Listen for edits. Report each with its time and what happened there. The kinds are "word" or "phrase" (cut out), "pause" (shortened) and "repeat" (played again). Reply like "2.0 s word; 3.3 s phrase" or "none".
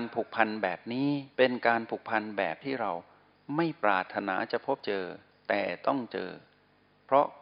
1.3 s pause